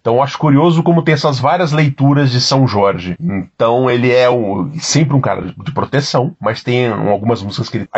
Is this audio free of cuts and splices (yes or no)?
yes